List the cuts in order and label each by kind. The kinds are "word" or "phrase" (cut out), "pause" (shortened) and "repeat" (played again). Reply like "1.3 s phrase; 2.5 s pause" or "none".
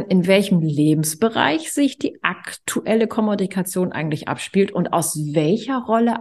none

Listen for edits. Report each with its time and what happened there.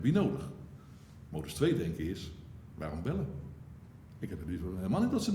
none

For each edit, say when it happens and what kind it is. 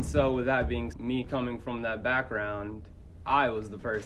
0.9 s word

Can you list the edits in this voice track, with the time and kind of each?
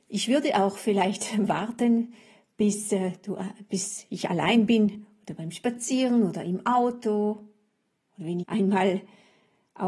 8.4 s word

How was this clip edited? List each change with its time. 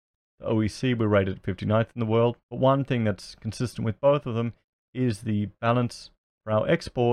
2.4 s pause

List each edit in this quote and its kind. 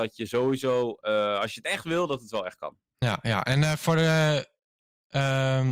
none

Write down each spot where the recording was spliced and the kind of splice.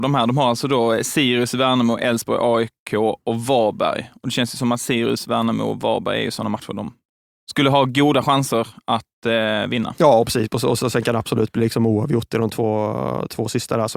none

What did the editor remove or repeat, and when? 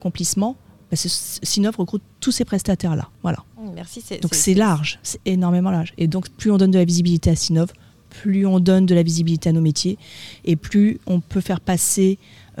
none

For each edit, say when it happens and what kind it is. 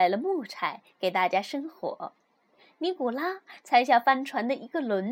none

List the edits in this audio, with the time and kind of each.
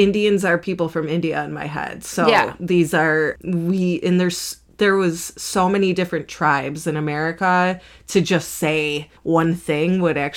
9.2 s pause

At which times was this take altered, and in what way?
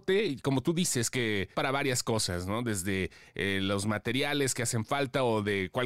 1.5 s word

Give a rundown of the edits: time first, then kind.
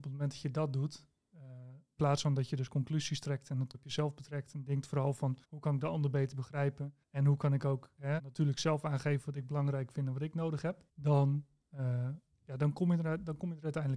2.0 s word; 3.7 s word; 5.4 s pause; 7.0 s pause; 8.2 s word; 10.9 s pause

